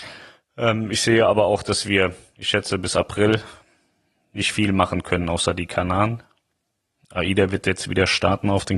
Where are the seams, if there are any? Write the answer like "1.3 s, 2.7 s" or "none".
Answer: none